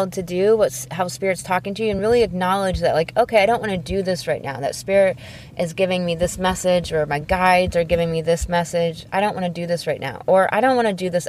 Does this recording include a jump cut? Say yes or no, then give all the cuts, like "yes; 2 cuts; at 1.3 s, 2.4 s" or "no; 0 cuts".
no; 0 cuts